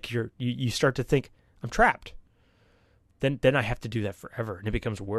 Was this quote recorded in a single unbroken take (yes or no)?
yes